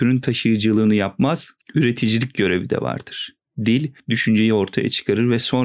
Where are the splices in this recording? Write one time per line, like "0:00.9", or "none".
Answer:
0:01.6
0:04.0

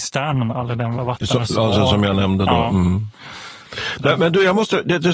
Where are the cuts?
none

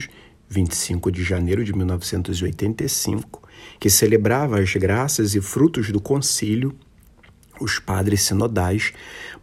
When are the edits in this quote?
none

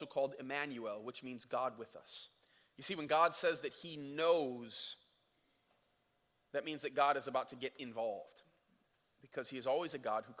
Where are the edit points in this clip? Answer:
none

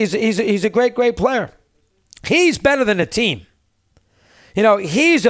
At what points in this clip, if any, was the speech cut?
none

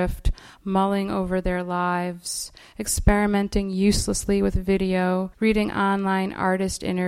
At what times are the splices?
0:05.3

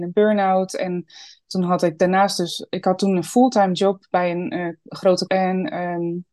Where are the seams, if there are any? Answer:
0:05.3

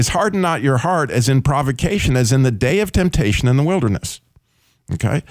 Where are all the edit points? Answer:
none

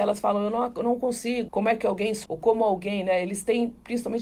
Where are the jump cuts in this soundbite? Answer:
0:01.5
0:02.2

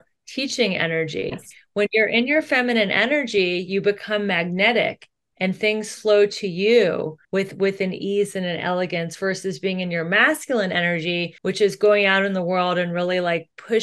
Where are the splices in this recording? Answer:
0:07.2
0:11.4

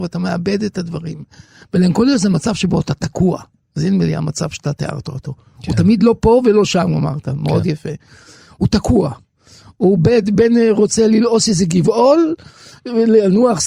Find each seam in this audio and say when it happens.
none

